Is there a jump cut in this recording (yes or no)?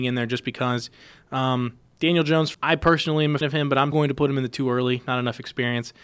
yes